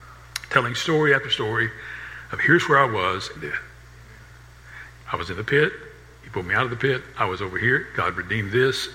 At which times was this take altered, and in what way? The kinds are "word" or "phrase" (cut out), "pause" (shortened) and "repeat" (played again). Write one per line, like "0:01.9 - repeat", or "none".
0:03.3 - phrase